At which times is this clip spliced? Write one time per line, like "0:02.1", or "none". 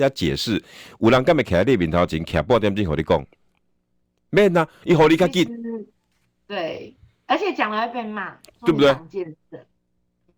none